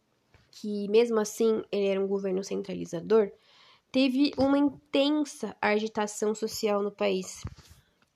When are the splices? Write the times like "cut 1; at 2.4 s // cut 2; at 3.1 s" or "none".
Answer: none